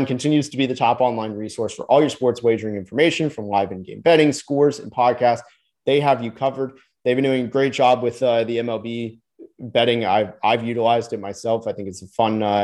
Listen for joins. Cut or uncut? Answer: uncut